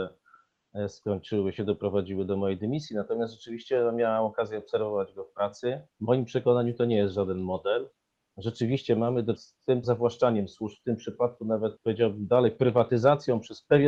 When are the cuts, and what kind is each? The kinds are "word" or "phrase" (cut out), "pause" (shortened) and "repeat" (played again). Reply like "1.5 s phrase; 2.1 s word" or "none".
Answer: 5.9 s pause; 9.4 s word; 9.8 s phrase; 11.8 s pause